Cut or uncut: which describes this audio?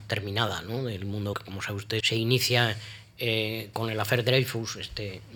cut